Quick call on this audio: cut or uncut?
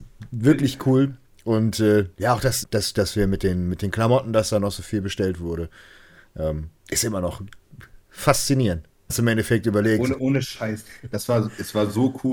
cut